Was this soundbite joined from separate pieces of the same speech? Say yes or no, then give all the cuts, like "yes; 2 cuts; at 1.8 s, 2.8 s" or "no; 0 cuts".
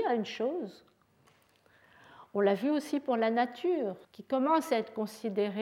yes; 1 cut; at 4.0 s